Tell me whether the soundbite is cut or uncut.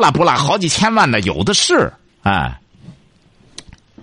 cut